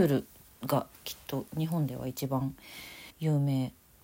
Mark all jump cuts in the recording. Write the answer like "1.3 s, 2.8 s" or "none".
0.9 s, 1.5 s, 3.1 s